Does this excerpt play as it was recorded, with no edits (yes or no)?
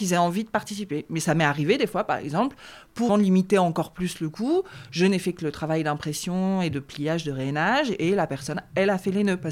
no